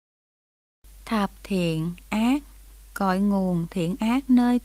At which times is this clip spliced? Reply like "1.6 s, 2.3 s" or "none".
1.4 s, 2.7 s